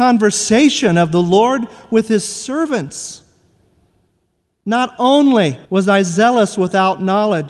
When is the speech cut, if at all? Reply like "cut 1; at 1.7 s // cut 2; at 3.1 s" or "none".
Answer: cut 1; at 5.6 s